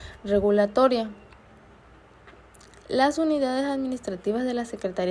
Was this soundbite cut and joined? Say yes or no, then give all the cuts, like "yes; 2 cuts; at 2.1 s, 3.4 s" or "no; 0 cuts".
no; 0 cuts